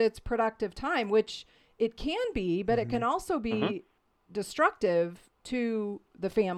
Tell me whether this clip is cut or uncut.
uncut